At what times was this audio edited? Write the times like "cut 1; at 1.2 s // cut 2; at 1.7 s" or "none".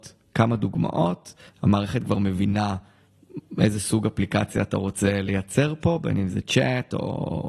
none